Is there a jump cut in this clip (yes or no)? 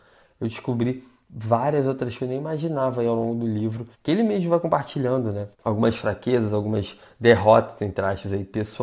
yes